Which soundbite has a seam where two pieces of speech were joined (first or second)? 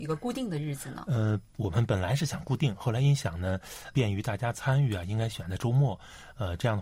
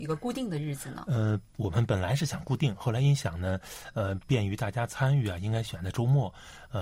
first